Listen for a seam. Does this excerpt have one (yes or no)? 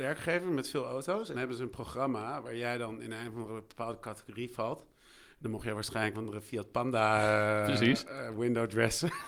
yes